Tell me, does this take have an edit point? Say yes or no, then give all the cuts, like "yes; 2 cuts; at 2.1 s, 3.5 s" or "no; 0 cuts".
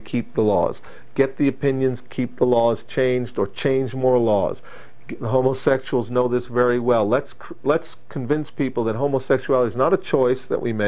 no; 0 cuts